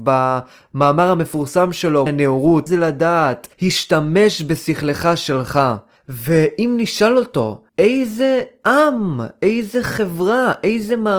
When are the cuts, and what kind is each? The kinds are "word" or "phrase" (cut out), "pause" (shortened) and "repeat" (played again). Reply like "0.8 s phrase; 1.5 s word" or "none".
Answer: 2.1 s word; 2.7 s word; 3.5 s pause; 6.0 s pause; 7.7 s pause